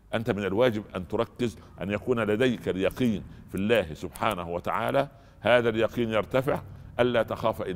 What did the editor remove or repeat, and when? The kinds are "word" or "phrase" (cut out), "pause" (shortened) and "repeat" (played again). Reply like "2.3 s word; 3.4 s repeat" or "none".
none